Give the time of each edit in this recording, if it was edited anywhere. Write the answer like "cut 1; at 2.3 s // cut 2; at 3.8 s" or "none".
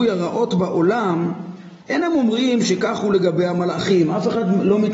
cut 1; at 1.8 s